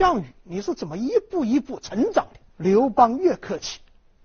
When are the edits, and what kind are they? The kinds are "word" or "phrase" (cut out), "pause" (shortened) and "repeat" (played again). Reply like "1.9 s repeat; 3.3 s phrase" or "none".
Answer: 2.5 s pause